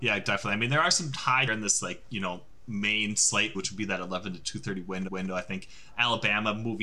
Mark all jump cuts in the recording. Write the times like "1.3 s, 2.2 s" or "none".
1.5 s, 3.5 s, 5.1 s